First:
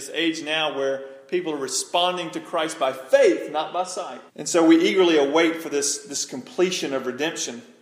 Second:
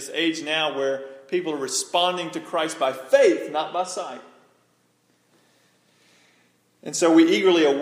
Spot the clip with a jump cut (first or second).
first